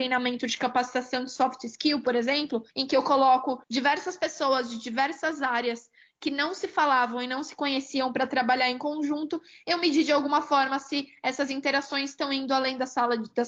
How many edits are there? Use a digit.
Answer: 2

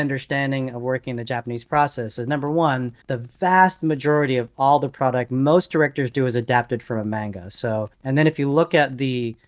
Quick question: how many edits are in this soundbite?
2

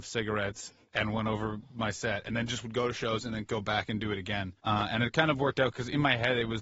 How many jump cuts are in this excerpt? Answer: 1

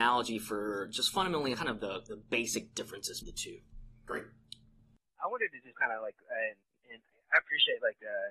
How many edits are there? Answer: 3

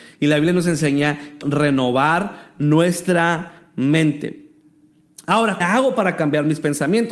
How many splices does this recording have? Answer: 2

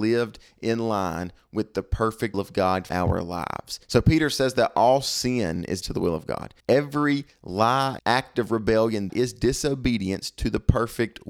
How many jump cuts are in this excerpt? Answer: 7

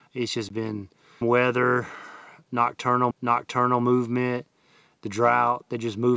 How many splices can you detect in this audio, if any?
2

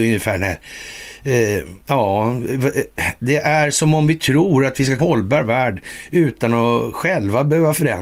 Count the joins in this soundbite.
2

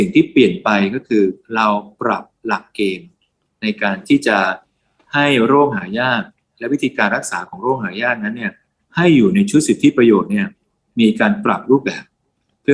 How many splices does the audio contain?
1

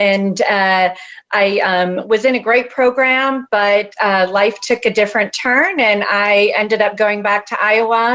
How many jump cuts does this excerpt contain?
0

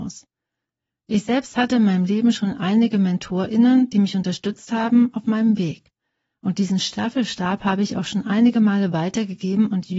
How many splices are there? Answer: 0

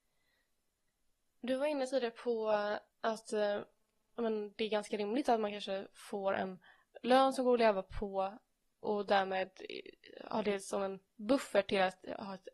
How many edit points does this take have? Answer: 1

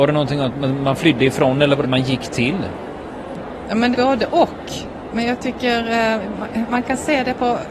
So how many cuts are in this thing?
2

